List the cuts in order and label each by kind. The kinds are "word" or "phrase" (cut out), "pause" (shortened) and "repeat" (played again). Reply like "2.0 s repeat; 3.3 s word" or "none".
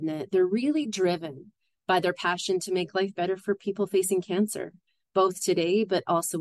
none